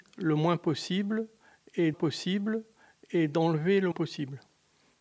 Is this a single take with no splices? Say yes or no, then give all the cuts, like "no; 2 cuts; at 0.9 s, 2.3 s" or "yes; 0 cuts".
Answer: no; 2 cuts; at 1.9 s, 3.9 s